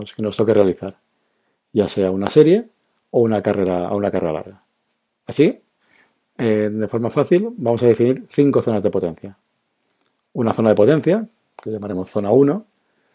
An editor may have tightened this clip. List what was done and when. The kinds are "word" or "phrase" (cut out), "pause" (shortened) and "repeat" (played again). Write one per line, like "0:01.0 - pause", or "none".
none